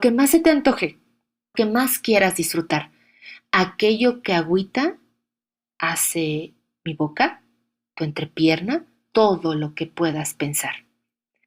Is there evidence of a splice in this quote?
yes; 2 cuts; at 1.5 s, 9.1 s

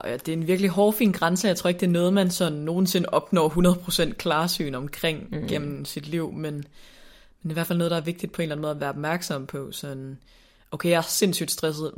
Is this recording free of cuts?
yes; 0 cuts

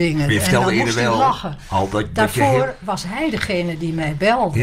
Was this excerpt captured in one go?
yes; 0 cuts

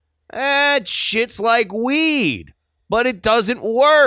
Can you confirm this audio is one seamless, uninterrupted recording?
yes; 0 cuts

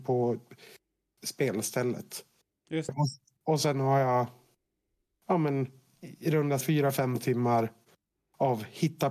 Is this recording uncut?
no; 3 cuts; at 1.1 s, 2.9 s, 6.6 s

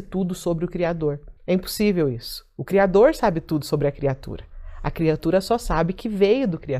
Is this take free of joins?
no; 1 cut; at 1.4 s

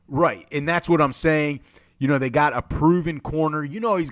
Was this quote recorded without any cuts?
yes; 0 cuts

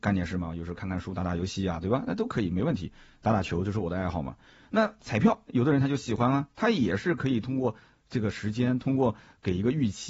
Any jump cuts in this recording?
yes; 1 cut; at 5.5 s

